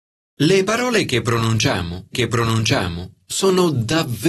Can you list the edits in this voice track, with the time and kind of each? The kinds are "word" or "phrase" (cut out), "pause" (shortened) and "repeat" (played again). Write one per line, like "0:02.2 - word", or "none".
0:02.1 - repeat